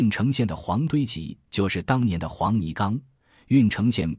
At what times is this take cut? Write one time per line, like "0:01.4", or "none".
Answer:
none